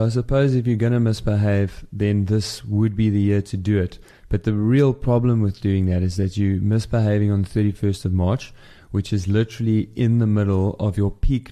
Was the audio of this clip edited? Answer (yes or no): no